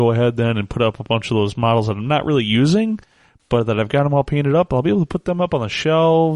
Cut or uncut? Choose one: uncut